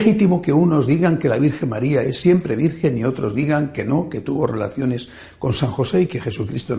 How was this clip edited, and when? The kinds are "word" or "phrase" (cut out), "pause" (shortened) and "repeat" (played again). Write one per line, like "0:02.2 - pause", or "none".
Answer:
none